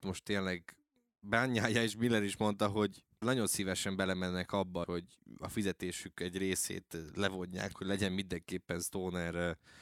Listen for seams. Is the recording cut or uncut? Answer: cut